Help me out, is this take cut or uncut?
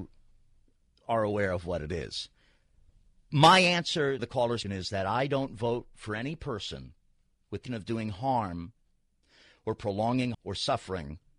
cut